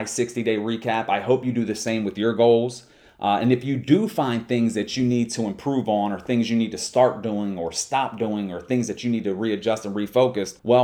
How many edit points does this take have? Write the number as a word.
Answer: zero